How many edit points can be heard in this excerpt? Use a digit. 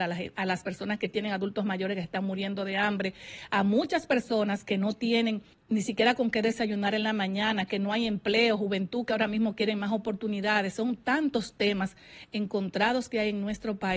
1